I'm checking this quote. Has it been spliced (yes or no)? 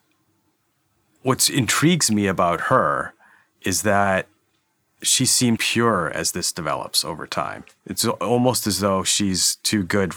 yes